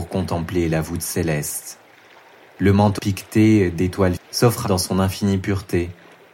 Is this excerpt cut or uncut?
cut